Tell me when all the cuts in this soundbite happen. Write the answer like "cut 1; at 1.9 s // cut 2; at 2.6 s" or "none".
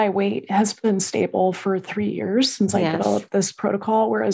none